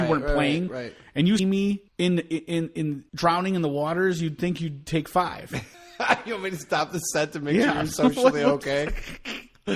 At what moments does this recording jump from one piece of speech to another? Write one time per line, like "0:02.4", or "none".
0:01.4
0:01.9
0:03.1
0:05.7